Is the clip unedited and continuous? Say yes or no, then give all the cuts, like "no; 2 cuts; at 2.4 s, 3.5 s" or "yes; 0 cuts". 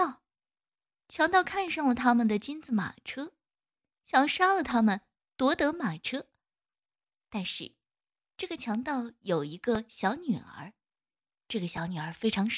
yes; 0 cuts